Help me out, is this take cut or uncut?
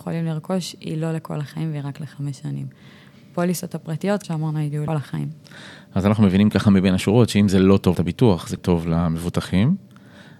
cut